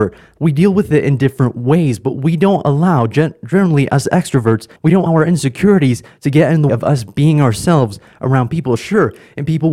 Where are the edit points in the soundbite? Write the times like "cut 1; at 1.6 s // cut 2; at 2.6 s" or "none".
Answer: cut 1; at 4.8 s // cut 2; at 5.1 s // cut 3; at 6.7 s